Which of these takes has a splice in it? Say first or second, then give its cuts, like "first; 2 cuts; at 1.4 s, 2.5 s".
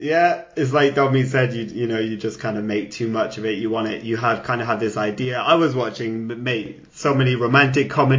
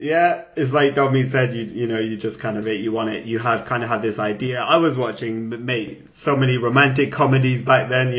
second; 1 cut; at 2.6 s